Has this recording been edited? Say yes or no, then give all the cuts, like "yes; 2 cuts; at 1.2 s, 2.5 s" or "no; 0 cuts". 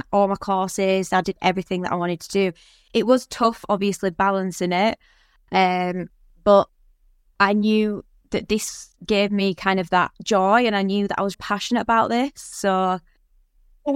yes; 3 cuts; at 1.2 s, 10.1 s, 11.3 s